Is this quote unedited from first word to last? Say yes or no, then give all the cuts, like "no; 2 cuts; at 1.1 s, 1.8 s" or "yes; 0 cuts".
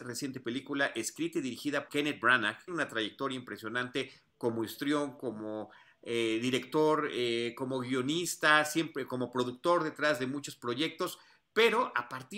no; 2 cuts; at 1.9 s, 2.7 s